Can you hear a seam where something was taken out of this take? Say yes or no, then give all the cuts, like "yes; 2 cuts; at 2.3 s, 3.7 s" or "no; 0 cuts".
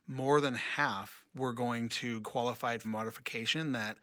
yes; 3 cuts; at 1.3 s, 2.2 s, 2.8 s